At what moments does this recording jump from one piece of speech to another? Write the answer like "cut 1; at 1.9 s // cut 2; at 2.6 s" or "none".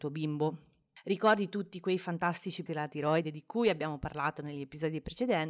cut 1; at 2.7 s